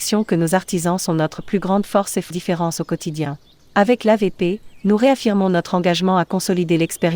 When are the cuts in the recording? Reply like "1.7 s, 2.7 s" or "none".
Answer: 2.3 s